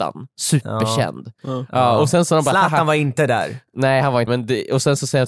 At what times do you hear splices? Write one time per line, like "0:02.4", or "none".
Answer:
0:04.3